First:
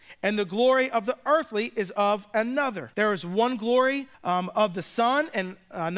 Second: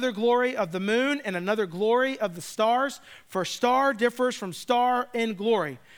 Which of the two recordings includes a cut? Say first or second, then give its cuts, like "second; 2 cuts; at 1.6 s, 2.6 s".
first; 2 cuts; at 2.9 s, 4.1 s